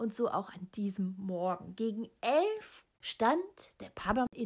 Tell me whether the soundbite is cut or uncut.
cut